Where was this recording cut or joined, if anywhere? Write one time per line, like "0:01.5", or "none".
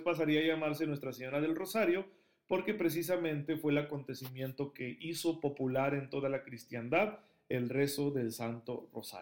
none